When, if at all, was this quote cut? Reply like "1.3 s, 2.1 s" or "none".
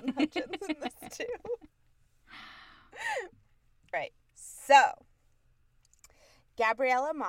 3.9 s